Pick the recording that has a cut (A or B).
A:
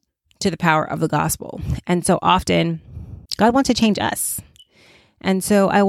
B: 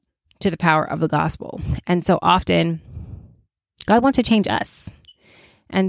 A